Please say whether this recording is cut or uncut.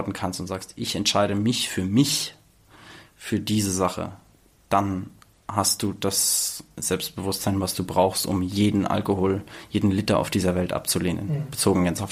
uncut